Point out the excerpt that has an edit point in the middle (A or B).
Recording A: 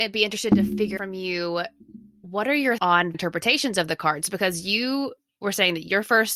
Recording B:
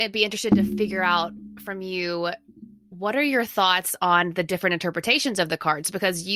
A